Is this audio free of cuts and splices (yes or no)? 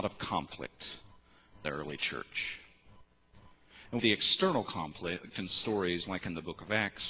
no